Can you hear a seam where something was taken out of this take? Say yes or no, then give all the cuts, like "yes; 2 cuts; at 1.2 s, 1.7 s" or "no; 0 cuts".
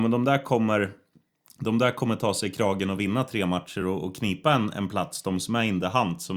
no; 0 cuts